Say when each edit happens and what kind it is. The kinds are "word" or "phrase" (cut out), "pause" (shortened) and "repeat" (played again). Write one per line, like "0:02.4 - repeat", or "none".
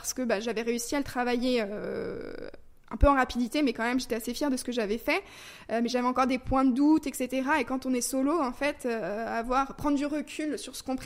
none